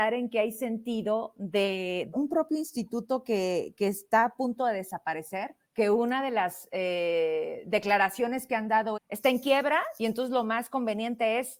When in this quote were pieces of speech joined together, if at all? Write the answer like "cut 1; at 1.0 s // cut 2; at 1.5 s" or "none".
cut 1; at 2.1 s // cut 2; at 5.6 s // cut 3; at 9.0 s